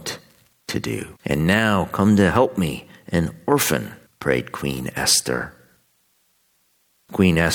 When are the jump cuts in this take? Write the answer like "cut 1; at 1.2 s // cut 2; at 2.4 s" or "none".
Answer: cut 1; at 1.2 s // cut 2; at 4.1 s